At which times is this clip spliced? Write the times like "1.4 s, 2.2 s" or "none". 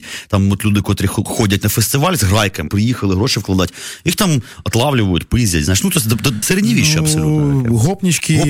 2.7 s, 6.4 s